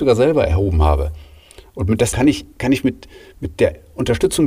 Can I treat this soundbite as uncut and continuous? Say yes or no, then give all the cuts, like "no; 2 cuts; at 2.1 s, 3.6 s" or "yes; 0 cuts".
no; 2 cuts; at 2.1 s, 2.5 s